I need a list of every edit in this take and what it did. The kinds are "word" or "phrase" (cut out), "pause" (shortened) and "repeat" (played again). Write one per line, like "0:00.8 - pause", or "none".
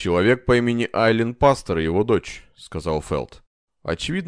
none